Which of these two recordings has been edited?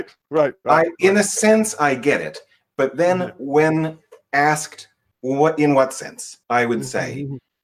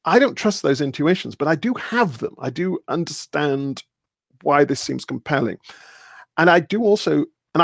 first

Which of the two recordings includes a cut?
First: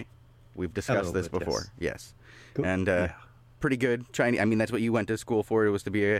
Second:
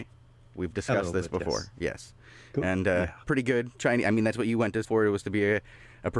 second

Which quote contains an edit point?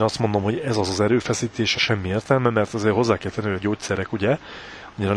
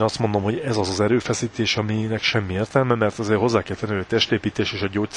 first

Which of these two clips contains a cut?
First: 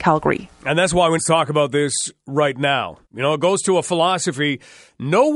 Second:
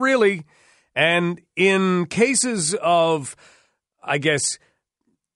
first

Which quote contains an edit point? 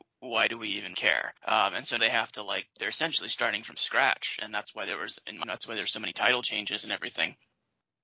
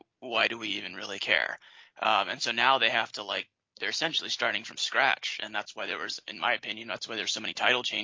first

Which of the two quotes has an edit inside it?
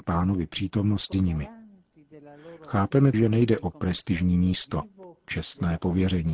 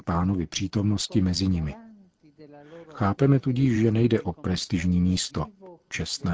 first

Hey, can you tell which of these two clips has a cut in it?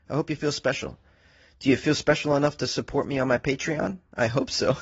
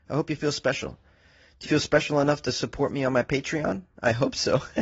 second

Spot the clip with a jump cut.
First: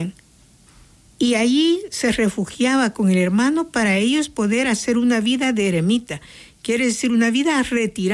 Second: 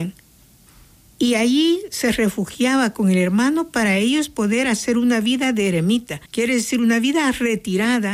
second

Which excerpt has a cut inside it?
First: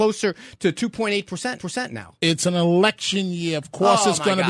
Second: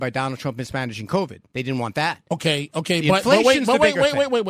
first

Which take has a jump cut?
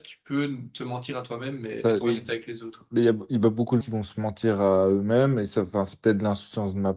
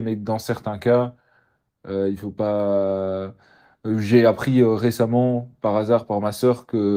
first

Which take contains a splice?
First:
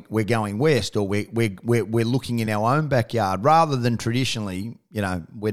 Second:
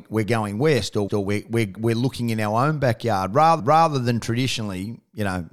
second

